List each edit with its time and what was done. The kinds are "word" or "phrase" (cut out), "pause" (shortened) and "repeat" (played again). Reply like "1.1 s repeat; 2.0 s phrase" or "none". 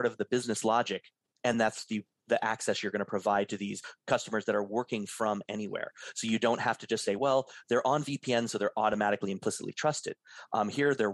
none